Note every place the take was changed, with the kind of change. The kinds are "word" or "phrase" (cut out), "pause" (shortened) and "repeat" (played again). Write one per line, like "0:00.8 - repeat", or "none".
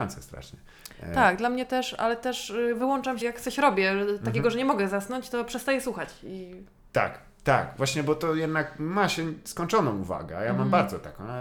0:03.2 - word